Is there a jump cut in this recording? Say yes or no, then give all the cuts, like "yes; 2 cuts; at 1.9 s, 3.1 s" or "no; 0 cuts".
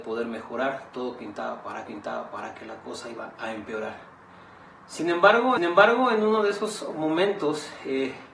yes; 2 cuts; at 1.9 s, 5.6 s